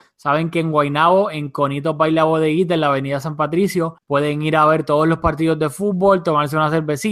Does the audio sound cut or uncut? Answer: cut